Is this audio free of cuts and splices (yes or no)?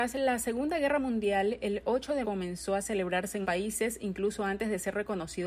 no